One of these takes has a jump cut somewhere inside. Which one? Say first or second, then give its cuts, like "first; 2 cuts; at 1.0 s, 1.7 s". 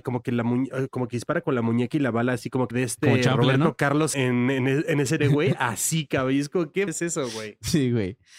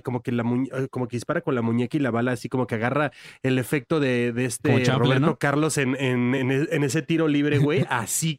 first; 4 cuts; at 2.7 s, 4.1 s, 5.2 s, 6.9 s